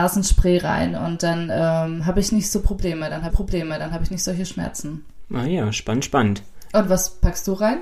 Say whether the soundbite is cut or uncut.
cut